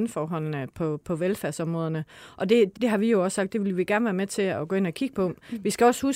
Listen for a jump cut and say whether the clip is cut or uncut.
cut